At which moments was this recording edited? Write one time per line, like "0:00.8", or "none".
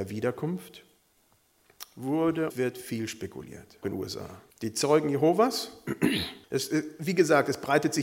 0:02.5
0:03.8
0:04.5
0:06.4